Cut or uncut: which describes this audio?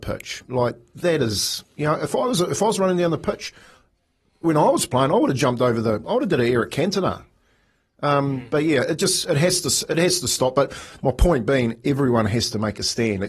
uncut